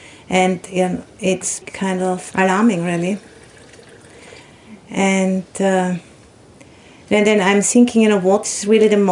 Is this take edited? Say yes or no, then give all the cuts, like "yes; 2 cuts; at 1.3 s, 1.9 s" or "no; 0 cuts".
yes; 2 cuts; at 1.6 s, 2.3 s